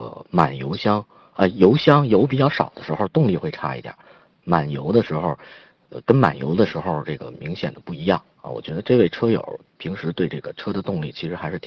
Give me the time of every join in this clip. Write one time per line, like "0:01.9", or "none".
0:08.3

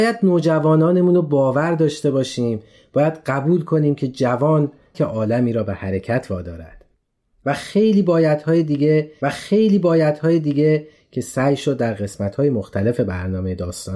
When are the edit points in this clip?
0:04.9
0:09.2

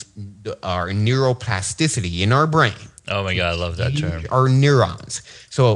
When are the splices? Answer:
0:03.0

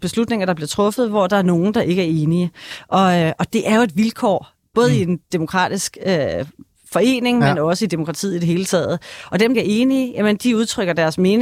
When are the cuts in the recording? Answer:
0:09.5

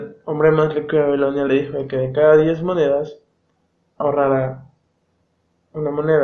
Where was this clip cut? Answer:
none

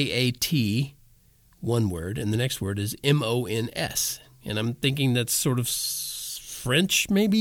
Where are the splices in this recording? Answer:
none

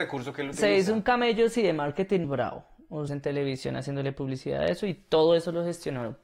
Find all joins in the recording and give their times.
0:02.2
0:03.1

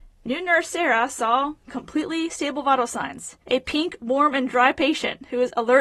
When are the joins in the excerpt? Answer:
0:03.4

